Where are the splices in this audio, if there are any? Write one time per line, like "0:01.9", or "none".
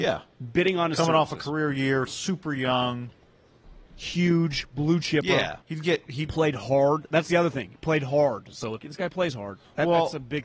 0:02.1
0:03.9
0:05.6
0:08.8